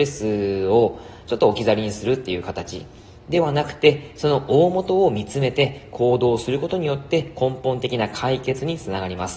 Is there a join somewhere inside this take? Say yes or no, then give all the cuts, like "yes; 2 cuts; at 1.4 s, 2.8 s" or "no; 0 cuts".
no; 0 cuts